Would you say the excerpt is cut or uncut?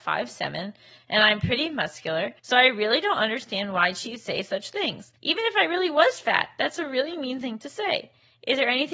cut